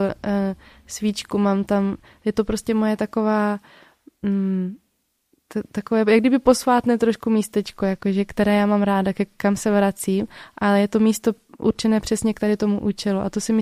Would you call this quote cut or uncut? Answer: uncut